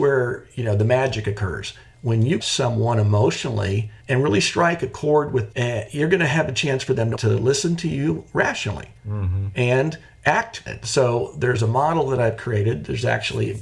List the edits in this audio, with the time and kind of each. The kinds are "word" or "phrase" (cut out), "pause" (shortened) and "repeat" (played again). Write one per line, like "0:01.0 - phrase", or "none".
0:02.4 - phrase
0:04.0 - pause
0:05.5 - word
0:07.1 - word
0:10.7 - word